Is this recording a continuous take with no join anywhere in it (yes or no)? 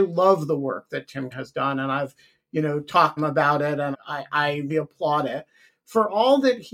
no